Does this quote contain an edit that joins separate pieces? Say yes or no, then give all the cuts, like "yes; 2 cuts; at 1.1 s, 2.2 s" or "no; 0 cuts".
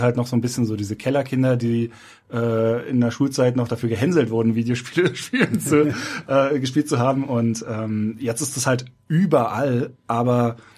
no; 0 cuts